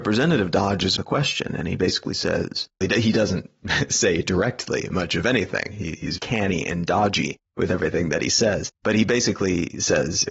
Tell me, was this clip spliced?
yes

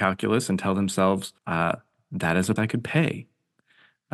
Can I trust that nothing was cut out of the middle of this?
no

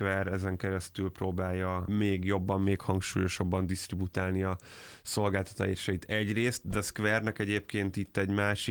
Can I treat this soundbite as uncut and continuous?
yes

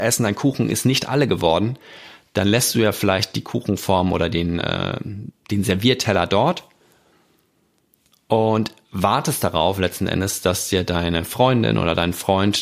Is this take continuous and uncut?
yes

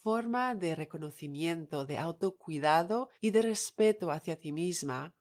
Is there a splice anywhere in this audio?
yes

